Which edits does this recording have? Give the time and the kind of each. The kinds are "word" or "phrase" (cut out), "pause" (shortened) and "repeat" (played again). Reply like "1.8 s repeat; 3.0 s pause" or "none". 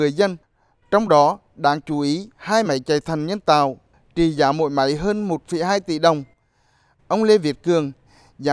none